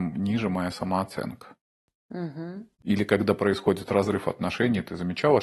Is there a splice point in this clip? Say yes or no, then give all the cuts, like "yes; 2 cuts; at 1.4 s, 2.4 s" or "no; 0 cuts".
yes; 1 cut; at 2.7 s